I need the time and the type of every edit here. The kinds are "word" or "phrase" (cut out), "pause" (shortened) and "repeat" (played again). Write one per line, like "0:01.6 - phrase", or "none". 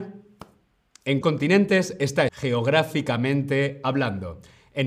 0:01.2 - word
0:02.3 - word